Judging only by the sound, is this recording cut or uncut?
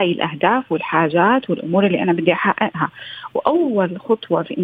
uncut